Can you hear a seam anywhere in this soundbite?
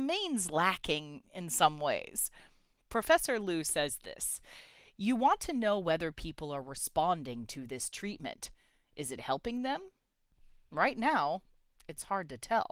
no; 0 cuts

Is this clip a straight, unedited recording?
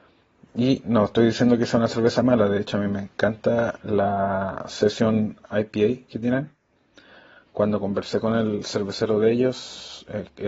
yes; 0 cuts

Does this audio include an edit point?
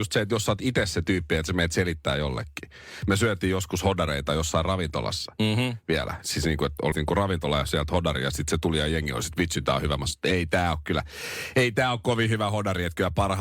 yes; 1 cut; at 6.9 s

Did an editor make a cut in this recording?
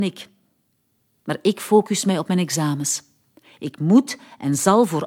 no; 0 cuts

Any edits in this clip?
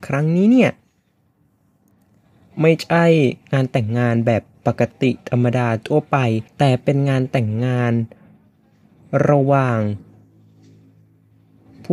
yes; 1 cut; at 6.5 s

